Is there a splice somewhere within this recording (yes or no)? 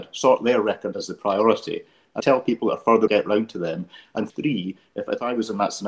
yes